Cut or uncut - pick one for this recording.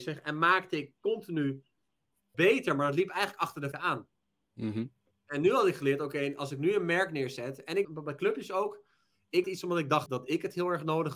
cut